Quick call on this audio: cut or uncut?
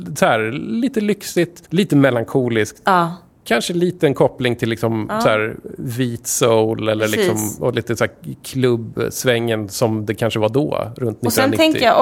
cut